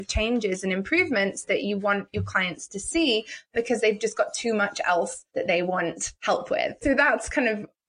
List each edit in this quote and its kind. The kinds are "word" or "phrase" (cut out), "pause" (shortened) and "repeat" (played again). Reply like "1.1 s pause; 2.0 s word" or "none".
none

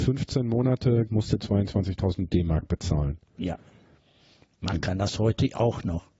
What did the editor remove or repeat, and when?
1.1 s phrase; 1.4 s word

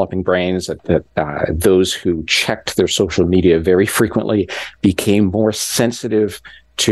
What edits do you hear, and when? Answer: 1.1 s pause

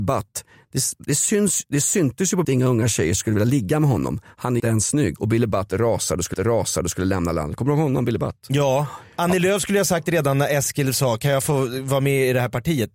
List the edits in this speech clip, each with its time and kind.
2.4 s phrase; 4.6 s word; 6.3 s repeat

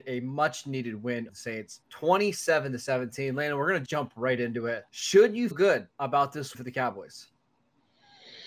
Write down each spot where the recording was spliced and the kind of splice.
1.3 s word; 1.8 s pause; 3.9 s word; 4.9 s pause; 5.5 s word; 5.9 s pause; 6.5 s word

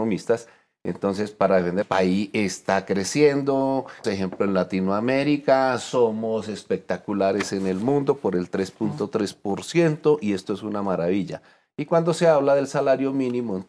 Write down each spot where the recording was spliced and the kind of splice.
1.8 s phrase; 4.0 s word

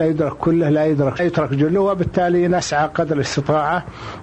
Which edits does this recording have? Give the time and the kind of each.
1.2 s phrase

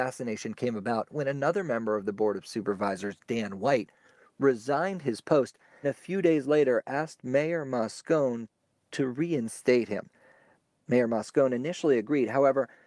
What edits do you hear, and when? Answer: 5.8 s word

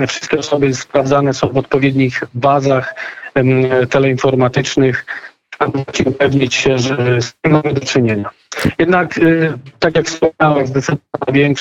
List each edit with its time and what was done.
10.7 s word

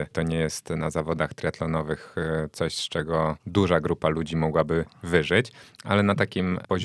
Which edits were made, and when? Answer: 3.4 s pause

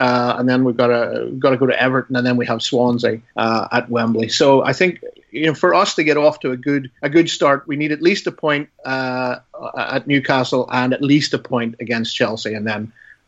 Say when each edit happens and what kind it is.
3.3 s pause; 7.0 s pause

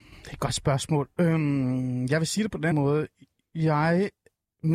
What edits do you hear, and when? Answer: 2.7 s word

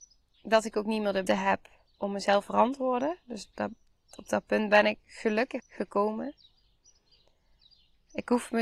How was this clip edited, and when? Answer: 1.3 s word; 2.4 s word; 5.6 s word

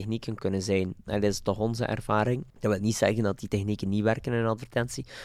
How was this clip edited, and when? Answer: 2.5 s pause

